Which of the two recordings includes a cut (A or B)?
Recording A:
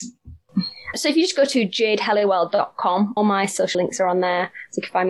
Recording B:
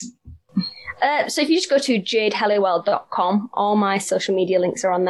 A